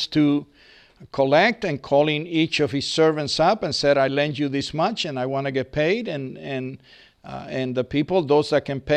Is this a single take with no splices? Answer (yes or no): yes